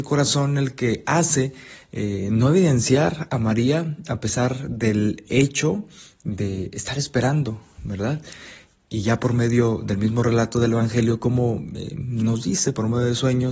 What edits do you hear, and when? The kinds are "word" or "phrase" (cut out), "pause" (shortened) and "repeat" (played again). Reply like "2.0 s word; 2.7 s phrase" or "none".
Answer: none

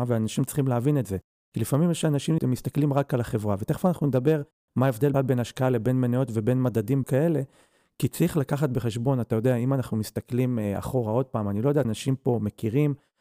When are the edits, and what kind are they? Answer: 2.4 s word; 5.1 s word; 7.0 s word; 11.8 s word

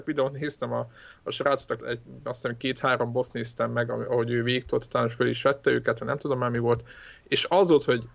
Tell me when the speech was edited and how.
1.8 s word; 4.0 s word

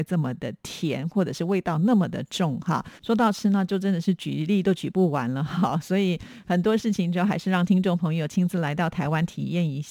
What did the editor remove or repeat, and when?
3.0 s pause

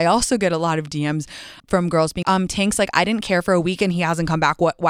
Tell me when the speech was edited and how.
1.6 s pause; 2.2 s word

